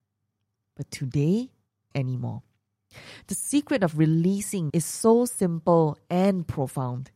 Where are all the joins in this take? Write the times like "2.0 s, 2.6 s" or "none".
1.9 s, 4.7 s